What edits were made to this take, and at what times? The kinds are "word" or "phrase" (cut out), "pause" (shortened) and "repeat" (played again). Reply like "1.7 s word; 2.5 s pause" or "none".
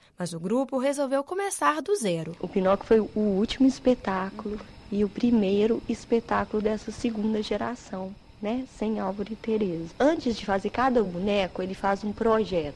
none